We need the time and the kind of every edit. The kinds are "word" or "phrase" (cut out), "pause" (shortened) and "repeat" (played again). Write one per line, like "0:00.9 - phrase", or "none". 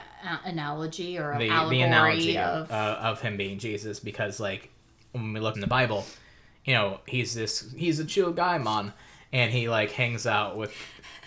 0:05.5 - phrase